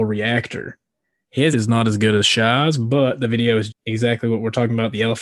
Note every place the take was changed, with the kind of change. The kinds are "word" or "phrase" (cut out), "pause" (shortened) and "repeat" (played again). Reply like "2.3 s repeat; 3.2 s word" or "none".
1.5 s word; 3.7 s word